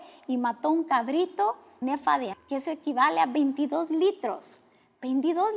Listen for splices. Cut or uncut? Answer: cut